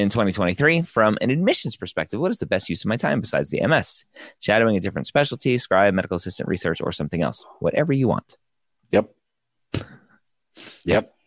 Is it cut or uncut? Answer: uncut